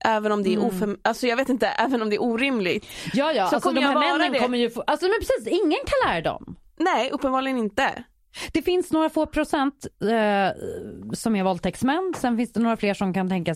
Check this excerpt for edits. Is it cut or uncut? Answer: uncut